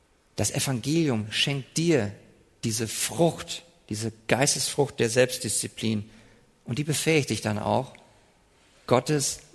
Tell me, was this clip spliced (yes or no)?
no